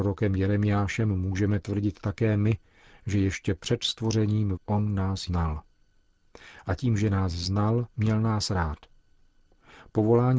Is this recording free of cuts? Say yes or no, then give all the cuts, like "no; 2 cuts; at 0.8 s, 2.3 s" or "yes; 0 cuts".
no; 3 cuts; at 4.5 s, 5.3 s, 7.9 s